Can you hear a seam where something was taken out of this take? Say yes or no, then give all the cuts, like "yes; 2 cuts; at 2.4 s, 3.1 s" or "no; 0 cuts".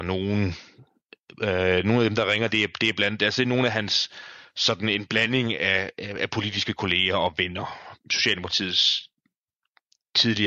yes; 1 cut; at 8.0 s